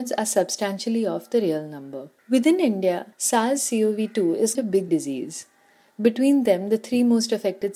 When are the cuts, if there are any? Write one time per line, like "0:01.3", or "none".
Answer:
0:02.2
0:03.1
0:04.6
0:04.9